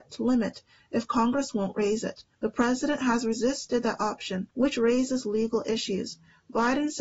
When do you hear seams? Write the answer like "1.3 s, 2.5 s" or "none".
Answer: 2.3 s, 4.5 s